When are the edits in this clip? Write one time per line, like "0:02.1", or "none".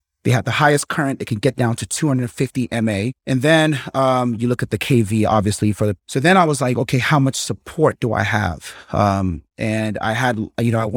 0:03.2
0:06.0